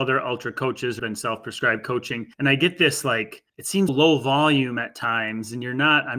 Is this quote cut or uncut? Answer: cut